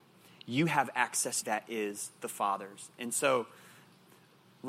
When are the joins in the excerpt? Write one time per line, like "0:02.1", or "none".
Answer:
0:01.4